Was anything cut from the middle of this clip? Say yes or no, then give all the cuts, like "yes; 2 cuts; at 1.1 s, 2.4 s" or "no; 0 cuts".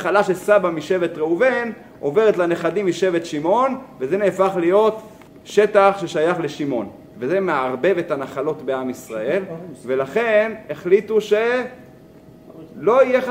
yes; 1 cut; at 5.3 s